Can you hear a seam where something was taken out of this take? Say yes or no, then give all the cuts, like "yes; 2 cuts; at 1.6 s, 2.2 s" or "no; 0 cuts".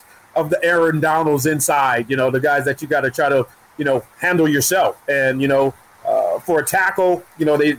no; 0 cuts